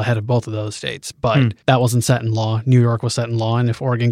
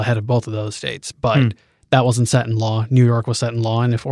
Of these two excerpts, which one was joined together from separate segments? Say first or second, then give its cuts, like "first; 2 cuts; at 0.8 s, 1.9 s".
first; 1 cut; at 1.6 s